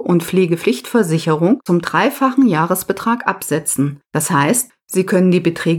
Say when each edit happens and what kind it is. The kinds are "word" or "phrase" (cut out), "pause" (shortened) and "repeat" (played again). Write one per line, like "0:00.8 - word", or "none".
0:01.7 - word
0:04.0 - pause